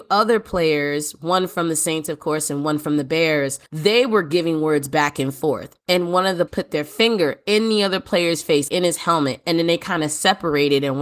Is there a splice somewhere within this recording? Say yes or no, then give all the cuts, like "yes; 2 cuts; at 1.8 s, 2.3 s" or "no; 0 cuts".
yes; 3 cuts; at 3.7 s, 6.5 s, 8.7 s